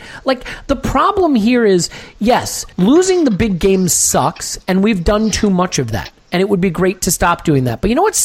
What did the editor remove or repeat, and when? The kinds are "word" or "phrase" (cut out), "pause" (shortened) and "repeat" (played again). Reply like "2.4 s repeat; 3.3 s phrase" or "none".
2.7 s pause